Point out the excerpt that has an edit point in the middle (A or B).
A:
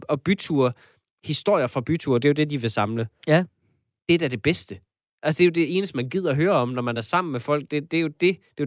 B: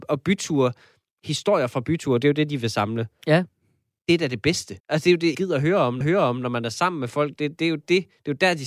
B